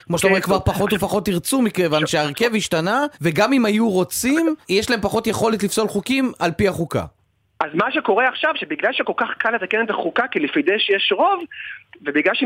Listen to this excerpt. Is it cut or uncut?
cut